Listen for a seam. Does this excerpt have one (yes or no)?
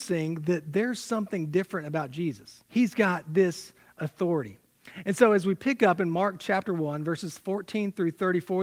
yes